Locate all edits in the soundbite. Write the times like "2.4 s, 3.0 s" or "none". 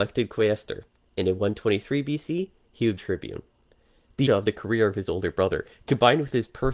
3.0 s, 4.3 s

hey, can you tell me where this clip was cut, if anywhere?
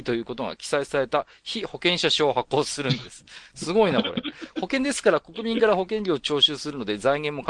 none

